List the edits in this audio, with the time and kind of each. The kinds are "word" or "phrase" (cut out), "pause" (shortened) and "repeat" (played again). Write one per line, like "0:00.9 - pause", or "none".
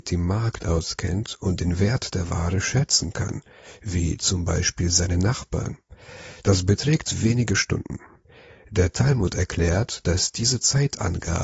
none